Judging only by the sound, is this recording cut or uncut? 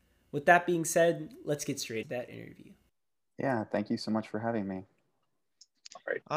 cut